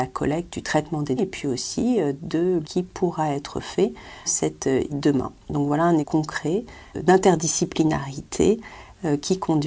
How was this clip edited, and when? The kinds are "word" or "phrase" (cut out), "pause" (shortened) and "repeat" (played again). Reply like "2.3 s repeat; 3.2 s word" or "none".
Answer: 1.2 s word; 2.6 s word; 4.3 s word; 4.9 s word; 6.0 s word